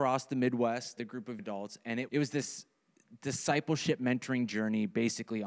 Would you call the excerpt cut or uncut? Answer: cut